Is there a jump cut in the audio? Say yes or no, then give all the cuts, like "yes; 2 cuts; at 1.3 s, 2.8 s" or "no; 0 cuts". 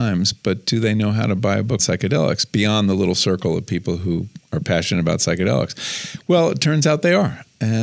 yes; 1 cut; at 1.8 s